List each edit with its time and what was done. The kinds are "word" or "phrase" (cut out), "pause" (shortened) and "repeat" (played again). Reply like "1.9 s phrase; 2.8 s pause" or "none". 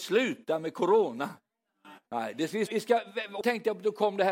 2.1 s pause; 2.7 s word; 3.4 s word